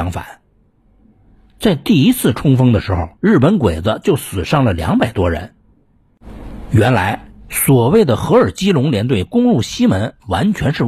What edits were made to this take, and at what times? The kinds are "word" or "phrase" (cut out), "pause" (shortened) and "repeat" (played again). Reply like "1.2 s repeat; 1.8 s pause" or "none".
3.1 s pause